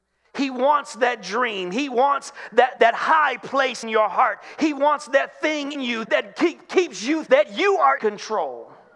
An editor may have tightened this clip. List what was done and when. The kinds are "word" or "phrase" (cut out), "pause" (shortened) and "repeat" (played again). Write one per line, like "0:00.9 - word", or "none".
0:02.8 - word
0:03.8 - word
0:05.7 - word
0:06.0 - word
0:07.3 - word
0:08.0 - word